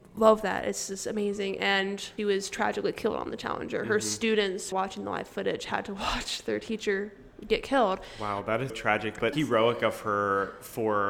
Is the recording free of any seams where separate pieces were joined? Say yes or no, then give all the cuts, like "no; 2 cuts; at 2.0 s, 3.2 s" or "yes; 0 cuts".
no; 4 cuts; at 2.2 s, 4.7 s, 8.7 s, 9.3 s